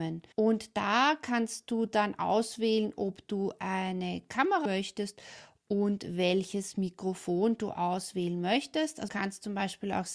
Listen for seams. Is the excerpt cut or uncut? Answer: cut